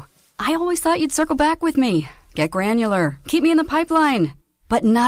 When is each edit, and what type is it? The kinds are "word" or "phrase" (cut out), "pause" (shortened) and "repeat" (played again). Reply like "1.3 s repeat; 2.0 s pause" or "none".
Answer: none